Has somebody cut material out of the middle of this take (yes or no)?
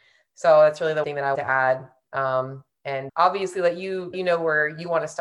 yes